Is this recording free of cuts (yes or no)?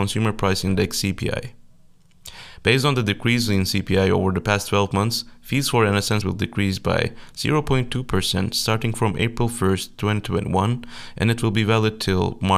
no